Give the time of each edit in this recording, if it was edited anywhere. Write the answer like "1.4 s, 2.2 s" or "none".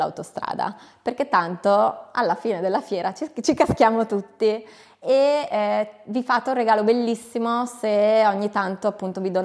none